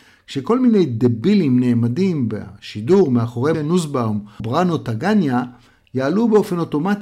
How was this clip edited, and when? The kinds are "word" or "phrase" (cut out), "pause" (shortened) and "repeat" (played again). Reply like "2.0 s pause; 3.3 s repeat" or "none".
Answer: 3.5 s word; 4.4 s word